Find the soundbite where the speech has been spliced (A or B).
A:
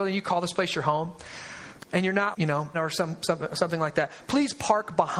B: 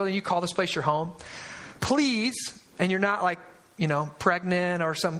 A